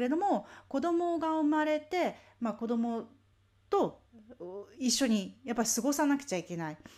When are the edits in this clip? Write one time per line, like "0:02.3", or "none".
0:03.3